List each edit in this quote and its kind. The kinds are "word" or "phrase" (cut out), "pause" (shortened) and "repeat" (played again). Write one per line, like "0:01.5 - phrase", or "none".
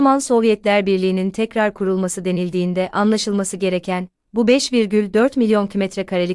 none